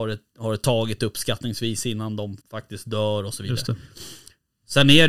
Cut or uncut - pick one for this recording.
cut